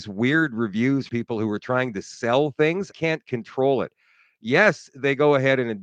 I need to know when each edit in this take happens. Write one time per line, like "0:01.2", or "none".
0:01.1
0:02.9